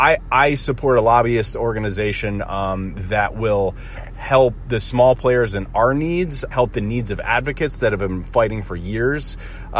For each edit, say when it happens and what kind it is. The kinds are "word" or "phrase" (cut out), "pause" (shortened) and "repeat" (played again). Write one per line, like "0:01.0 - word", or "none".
0:06.5 - word